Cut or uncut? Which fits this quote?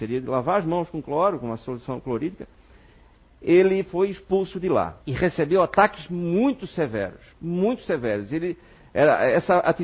cut